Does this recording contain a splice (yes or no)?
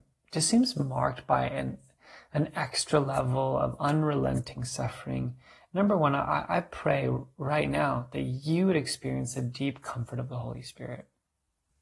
no